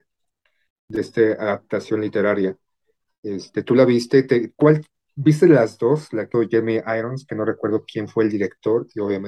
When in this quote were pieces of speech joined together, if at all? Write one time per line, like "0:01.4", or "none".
0:06.3

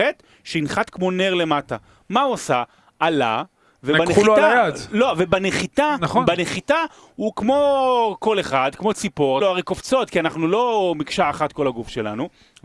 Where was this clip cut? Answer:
0:09.4

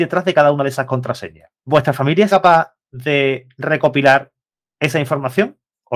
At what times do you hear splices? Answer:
0:01.6
0:02.3
0:02.8

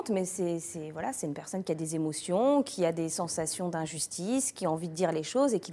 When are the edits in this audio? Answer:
none

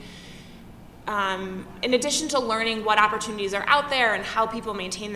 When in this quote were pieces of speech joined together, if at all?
none

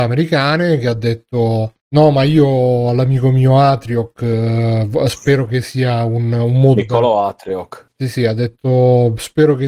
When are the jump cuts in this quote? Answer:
none

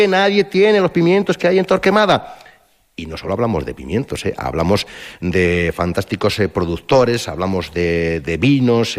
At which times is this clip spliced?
none

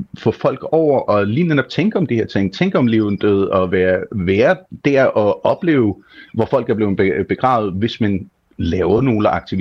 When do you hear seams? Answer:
none

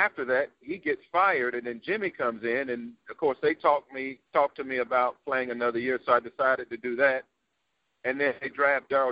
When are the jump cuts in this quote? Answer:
0:04.3

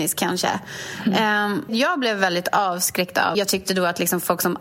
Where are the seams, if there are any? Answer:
0:01.7
0:03.3

